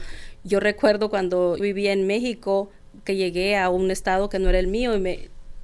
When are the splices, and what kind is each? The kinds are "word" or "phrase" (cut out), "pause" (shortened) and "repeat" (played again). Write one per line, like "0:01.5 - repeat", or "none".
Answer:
0:01.6 - word